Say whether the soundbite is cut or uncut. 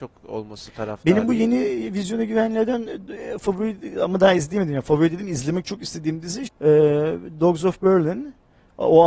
cut